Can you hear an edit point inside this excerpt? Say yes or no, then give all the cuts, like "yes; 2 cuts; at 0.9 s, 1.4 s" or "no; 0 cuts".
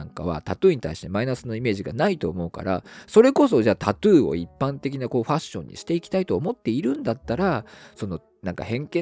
no; 0 cuts